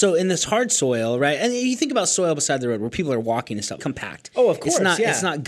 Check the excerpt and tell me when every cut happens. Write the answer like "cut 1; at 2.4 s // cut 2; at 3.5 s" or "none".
cut 1; at 3.8 s